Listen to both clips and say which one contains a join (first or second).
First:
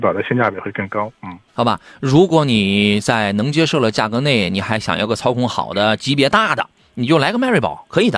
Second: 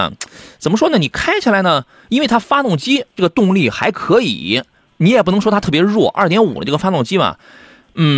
first